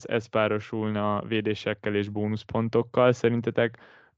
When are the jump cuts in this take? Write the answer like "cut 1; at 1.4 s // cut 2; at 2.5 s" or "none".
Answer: none